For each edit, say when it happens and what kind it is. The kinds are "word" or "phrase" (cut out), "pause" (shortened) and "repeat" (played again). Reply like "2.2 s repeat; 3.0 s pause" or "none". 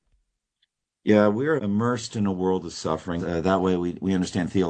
1.6 s word; 3.2 s phrase